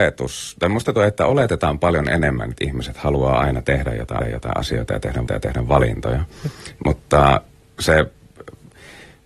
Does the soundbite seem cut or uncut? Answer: cut